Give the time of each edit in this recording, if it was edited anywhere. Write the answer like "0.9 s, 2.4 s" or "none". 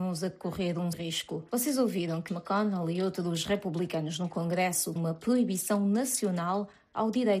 0.9 s, 2.3 s, 5.0 s